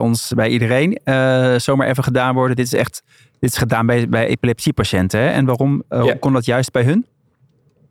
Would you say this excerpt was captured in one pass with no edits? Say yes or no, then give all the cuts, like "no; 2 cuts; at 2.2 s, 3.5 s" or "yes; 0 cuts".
yes; 0 cuts